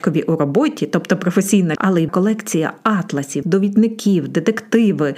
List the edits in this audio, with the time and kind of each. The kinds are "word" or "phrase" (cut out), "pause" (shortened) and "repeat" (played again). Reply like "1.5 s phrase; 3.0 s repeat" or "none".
1.8 s word; 2.1 s word; 3.4 s word